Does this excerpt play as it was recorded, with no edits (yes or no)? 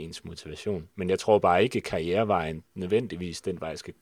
no